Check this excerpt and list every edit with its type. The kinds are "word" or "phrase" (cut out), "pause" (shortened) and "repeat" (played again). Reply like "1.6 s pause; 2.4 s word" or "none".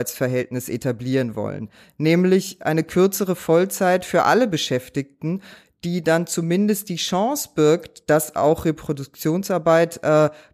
none